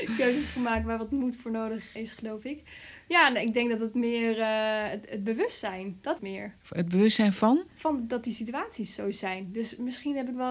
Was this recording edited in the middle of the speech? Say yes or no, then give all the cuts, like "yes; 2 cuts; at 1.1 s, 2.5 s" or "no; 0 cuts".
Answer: yes; 4 cuts; at 2.0 s, 6.2 s, 6.6 s, 7.7 s